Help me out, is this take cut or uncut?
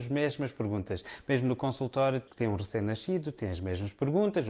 cut